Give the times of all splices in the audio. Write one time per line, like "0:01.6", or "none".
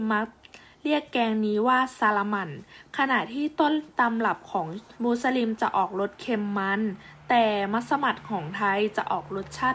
0:04.9